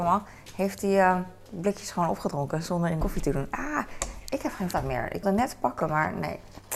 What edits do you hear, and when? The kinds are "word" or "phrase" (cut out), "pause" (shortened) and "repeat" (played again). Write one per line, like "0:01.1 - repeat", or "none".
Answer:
0:03.0 - word
0:04.7 - word
0:05.2 - word